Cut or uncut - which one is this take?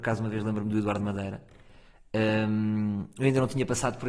uncut